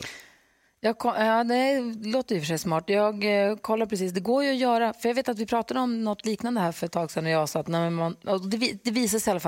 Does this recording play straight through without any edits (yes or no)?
yes